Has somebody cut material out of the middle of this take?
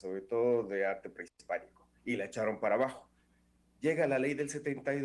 yes; 1 cut; at 2.0 s

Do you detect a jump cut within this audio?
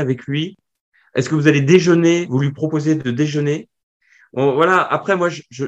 no; 0 cuts

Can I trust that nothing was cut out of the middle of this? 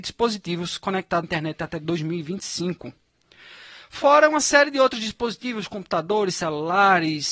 no; 1 cut; at 1.2 s

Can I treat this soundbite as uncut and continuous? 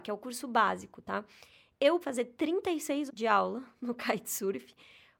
no; 2 cuts; at 2.0 s, 3.1 s

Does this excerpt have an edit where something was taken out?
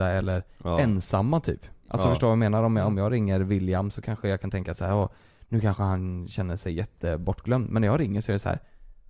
no; 0 cuts

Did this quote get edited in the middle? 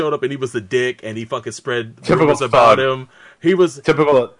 no; 0 cuts

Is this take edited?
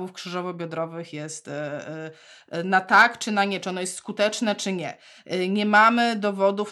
no; 0 cuts

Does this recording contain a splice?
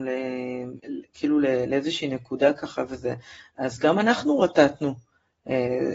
no; 0 cuts

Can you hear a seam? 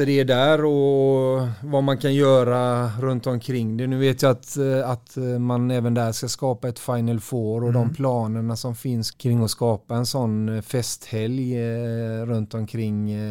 yes; 1 cut; at 9.1 s

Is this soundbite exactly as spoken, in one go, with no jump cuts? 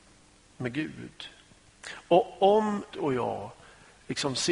no; 1 cut; at 2.9 s

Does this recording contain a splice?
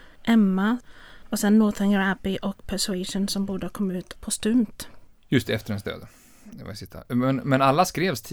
no; 0 cuts

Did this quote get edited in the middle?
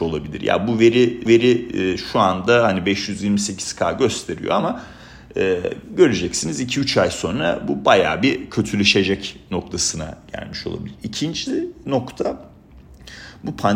yes; 1 cut; at 1.3 s

